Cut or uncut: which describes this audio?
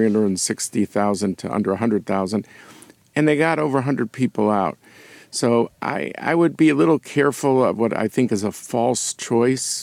uncut